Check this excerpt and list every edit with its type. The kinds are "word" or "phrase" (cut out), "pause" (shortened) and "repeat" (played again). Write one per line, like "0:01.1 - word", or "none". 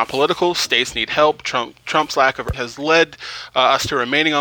0:02.5 - word